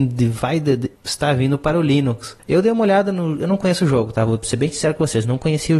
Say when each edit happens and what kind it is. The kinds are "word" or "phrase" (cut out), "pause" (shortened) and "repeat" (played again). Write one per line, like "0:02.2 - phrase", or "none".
none